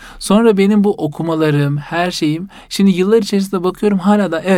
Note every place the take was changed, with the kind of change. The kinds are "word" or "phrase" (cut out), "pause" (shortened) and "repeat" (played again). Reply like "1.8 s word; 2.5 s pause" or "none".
none